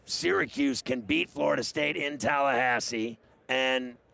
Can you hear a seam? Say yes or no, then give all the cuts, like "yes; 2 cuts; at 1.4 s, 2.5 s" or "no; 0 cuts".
yes; 1 cut; at 3.2 s